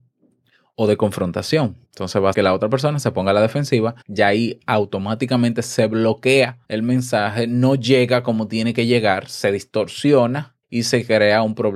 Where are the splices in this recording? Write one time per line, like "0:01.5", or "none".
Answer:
0:01.8
0:02.3
0:04.0
0:06.6
0:10.6

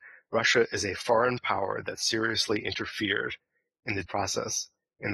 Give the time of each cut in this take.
0:04.0

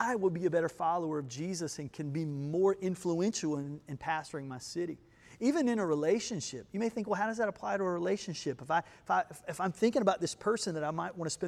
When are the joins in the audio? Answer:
none

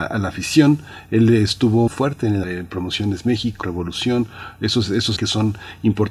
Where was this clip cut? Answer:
0:01.9
0:02.4
0:03.6
0:05.2

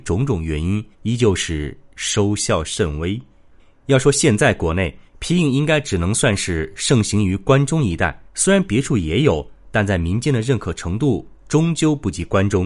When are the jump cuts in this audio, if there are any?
0:00.9
0:03.5
0:05.1
0:08.3

